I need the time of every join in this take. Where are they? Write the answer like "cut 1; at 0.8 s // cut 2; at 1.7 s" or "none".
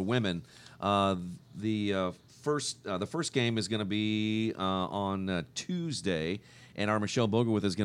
none